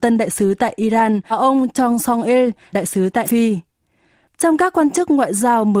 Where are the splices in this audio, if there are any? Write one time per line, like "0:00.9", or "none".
0:01.3
0:02.7
0:03.2